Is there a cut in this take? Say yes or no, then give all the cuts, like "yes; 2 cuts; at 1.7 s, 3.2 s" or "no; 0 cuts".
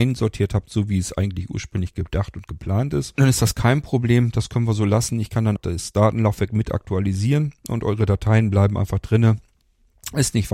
yes; 1 cut; at 5.6 s